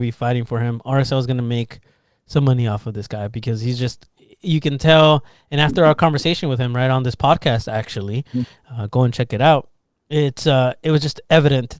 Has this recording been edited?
no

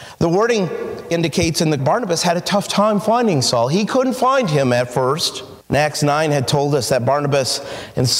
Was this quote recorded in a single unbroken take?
no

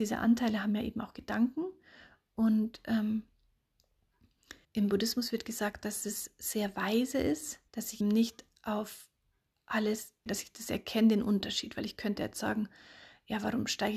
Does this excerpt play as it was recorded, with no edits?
no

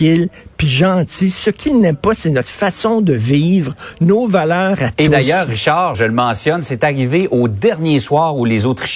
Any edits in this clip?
yes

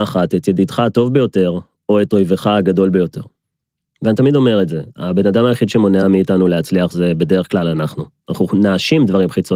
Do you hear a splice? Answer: no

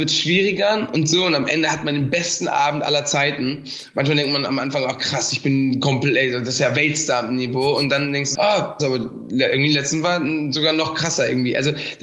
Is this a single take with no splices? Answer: no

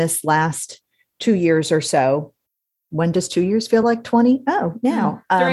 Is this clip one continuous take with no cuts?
yes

